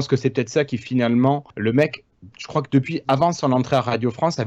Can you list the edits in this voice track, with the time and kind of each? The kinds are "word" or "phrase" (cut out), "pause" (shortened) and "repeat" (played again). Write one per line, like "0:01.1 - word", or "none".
0:01.5 - pause
0:02.3 - pause